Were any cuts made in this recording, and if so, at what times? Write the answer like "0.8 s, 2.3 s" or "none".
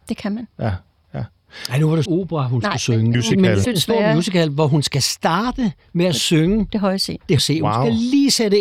2.1 s, 3.1 s, 3.6 s, 7.4 s